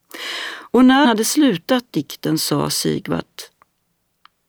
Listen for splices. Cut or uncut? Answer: cut